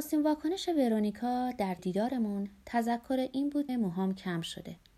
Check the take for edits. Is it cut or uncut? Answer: cut